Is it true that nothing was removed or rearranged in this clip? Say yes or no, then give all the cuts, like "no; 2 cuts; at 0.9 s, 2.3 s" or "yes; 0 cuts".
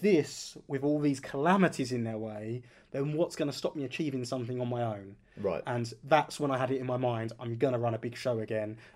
yes; 0 cuts